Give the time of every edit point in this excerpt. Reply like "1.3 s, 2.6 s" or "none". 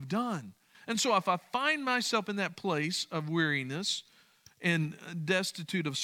none

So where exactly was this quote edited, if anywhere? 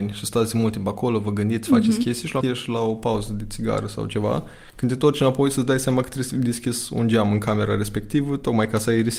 2.4 s

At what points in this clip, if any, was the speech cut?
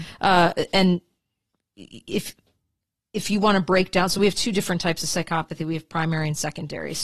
none

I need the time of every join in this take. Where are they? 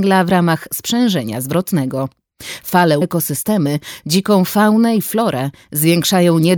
3.0 s

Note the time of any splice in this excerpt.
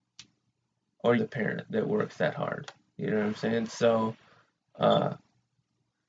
1.2 s

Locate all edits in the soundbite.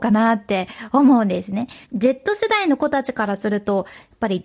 1.8 s

